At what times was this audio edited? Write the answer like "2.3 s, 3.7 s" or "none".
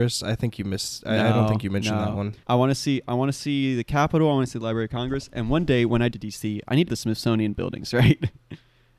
2.4 s, 6.1 s, 6.9 s